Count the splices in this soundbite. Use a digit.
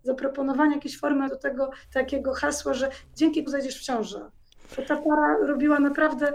3